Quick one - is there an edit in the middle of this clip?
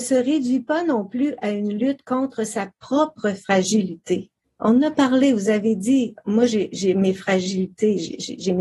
yes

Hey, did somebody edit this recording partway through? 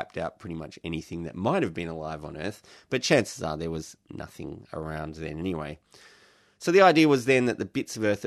no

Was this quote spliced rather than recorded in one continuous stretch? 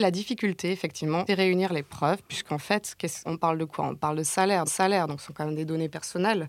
yes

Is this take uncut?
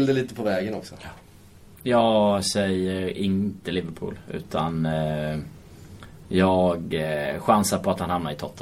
yes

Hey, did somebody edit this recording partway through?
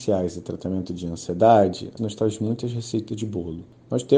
yes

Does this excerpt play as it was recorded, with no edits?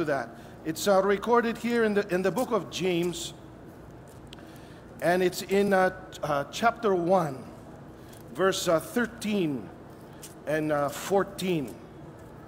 yes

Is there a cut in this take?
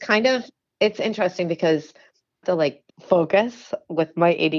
yes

